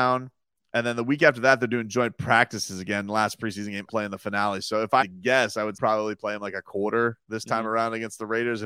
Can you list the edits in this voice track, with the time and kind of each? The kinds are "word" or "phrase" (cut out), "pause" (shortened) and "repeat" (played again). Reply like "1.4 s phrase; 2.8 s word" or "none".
3.9 s phrase; 5.0 s word; 5.7 s phrase; 7.2 s pause